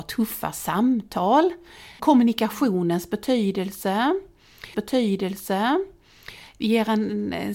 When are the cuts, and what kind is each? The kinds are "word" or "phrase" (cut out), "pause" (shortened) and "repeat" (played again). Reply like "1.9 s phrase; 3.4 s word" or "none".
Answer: 2.0 s word; 4.7 s repeat